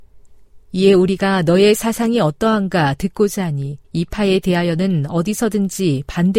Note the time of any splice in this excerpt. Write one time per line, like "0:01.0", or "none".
0:03.8